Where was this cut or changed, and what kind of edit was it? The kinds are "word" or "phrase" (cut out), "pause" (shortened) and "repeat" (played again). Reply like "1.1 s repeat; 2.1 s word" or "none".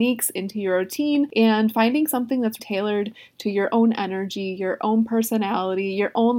2.6 s word